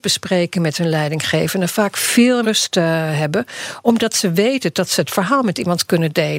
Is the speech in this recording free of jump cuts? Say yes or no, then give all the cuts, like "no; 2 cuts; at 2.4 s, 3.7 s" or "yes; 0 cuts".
no; 1 cut; at 2.4 s